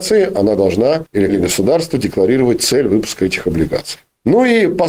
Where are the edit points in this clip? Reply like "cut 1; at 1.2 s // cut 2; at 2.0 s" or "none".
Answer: cut 1; at 1.3 s